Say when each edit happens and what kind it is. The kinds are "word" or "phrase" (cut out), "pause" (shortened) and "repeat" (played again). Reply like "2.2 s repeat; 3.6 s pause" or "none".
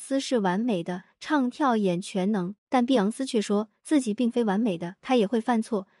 2.6 s pause